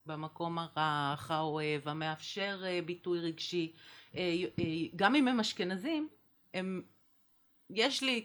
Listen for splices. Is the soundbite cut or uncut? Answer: uncut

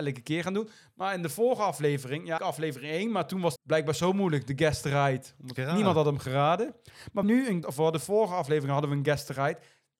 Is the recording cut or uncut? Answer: cut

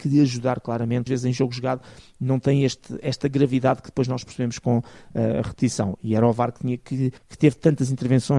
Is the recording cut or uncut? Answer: cut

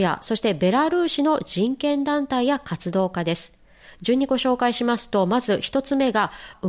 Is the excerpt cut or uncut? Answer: uncut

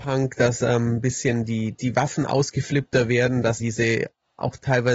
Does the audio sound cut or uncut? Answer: cut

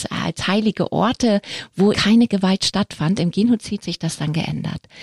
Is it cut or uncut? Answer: cut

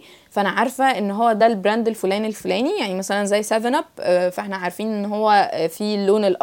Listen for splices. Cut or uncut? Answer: uncut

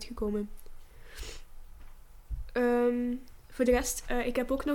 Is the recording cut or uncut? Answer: uncut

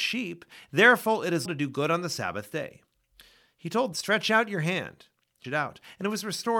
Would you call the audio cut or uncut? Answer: cut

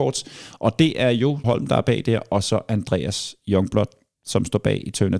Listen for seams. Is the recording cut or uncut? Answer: cut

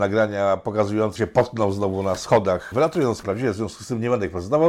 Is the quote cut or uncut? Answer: cut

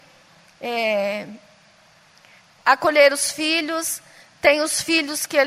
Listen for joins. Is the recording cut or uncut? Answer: uncut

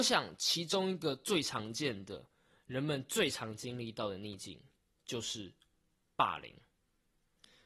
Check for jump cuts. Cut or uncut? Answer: uncut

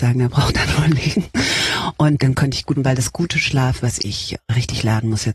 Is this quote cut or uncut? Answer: cut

